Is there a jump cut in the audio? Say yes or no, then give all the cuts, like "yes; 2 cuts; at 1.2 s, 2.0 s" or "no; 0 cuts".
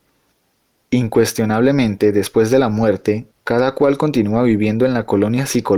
no; 0 cuts